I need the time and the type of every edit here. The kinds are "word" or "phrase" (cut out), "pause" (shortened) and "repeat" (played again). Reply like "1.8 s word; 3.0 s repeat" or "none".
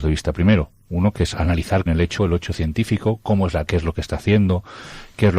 1.1 s word; 1.9 s phrase; 2.2 s word; 3.7 s word